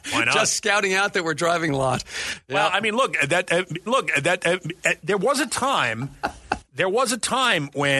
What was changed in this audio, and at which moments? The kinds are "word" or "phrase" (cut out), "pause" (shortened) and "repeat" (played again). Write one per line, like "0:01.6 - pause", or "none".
0:01.7 - phrase
0:03.9 - repeat